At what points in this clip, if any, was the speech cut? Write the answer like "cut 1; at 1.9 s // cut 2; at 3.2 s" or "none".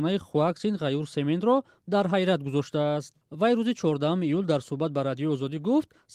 none